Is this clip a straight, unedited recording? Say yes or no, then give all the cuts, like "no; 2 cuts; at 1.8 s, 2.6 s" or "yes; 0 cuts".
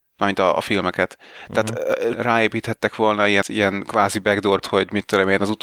no; 3 cuts; at 2.1 s, 3.4 s, 4.6 s